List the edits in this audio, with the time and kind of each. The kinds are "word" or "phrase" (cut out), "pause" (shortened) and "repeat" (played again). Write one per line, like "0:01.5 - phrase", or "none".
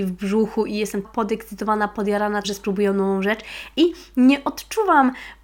0:01.0 - word
0:02.4 - word